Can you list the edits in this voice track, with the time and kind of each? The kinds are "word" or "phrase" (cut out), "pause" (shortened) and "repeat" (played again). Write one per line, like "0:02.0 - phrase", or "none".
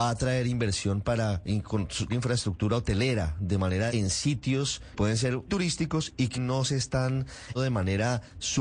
0:02.1 - word
0:03.9 - word
0:04.9 - word
0:05.5 - word
0:06.3 - word
0:07.6 - word